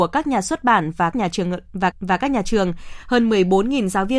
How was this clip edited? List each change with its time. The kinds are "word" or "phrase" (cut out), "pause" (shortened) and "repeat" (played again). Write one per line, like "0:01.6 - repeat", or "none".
0:01.1 - word
0:01.9 - repeat